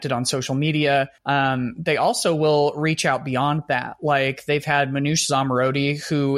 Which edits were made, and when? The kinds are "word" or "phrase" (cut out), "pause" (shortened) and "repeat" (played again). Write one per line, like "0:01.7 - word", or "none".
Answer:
0:01.2 - pause